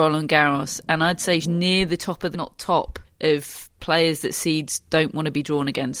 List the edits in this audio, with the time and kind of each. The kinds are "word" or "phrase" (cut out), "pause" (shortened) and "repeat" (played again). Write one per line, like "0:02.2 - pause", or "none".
0:01.4 - word
0:02.3 - phrase
0:03.0 - pause